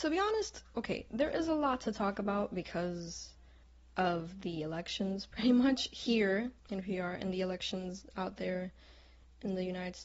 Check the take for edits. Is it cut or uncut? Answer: cut